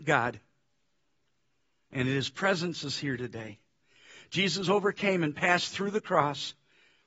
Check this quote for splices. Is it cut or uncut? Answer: uncut